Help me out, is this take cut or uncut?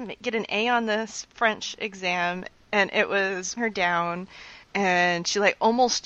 cut